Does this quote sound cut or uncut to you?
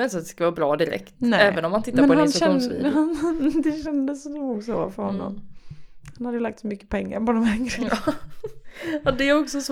uncut